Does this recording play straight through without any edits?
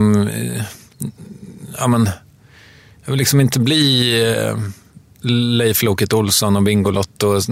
yes; 0 cuts

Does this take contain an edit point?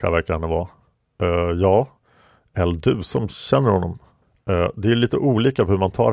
no; 0 cuts

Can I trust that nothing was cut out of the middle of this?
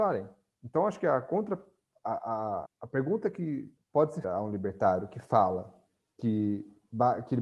no; 3 cuts; at 2.7 s, 3.8 s, 4.2 s

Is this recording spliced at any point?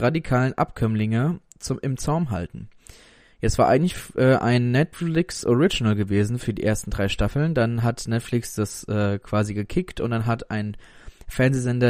no; 0 cuts

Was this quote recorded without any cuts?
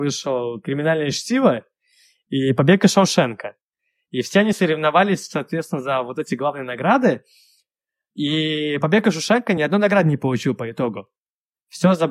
yes; 0 cuts

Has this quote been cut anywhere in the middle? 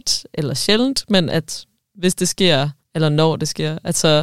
yes; 1 cut; at 2.8 s

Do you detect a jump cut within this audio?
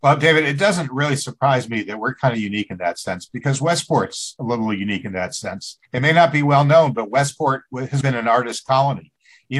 yes; 2 cuts; at 5.8 s, 8.0 s

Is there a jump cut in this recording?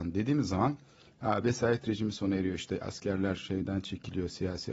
no; 0 cuts

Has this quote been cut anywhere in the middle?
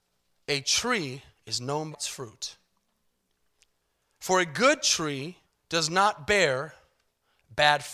yes; 3 cuts; at 1.3 s, 1.9 s, 5.4 s

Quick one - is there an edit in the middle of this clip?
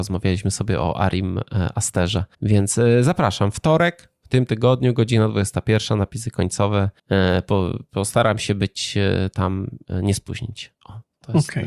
yes; 2 cuts; at 2.3 s, 7.0 s

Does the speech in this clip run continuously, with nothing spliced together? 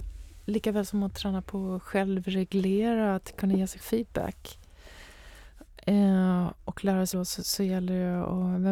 no; 2 cuts; at 3.8 s, 7.1 s

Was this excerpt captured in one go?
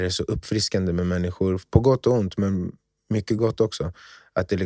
yes; 0 cuts

